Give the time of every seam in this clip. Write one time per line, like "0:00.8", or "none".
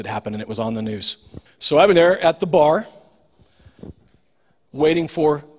0:01.5
0:01.9